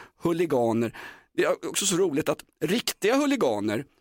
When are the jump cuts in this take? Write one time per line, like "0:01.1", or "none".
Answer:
none